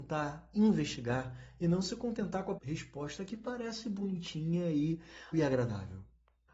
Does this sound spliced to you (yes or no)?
yes